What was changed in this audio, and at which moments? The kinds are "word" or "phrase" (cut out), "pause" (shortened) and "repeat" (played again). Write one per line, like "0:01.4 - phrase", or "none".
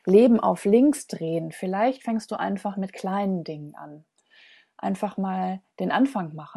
none